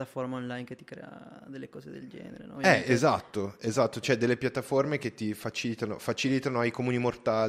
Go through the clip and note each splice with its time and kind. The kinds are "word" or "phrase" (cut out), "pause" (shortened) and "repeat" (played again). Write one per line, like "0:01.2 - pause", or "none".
none